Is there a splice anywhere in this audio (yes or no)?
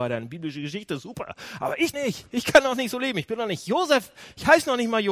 yes